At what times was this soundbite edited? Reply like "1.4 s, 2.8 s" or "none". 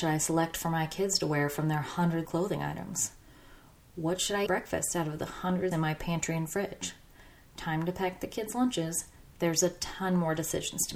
2.2 s, 4.5 s, 5.7 s